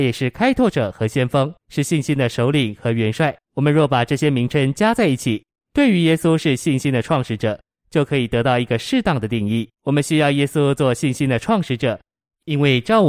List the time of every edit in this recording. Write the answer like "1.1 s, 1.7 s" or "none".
1.6 s, 3.4 s, 9.7 s